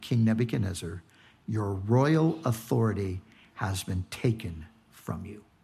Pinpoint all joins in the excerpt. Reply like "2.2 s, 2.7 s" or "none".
none